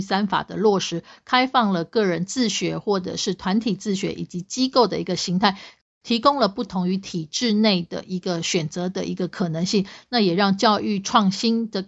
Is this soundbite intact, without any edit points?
yes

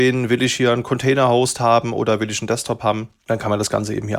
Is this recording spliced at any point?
no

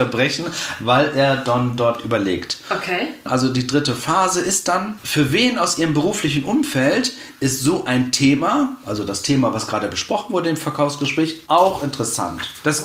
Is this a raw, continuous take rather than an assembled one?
yes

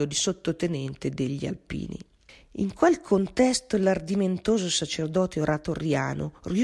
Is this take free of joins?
yes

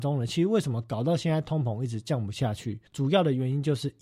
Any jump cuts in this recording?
yes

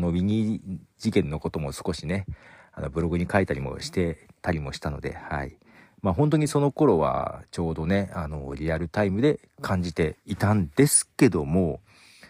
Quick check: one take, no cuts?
yes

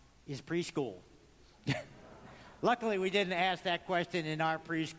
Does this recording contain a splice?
no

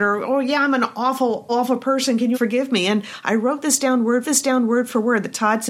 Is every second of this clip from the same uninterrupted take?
no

